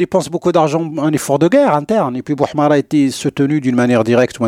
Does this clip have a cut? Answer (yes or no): no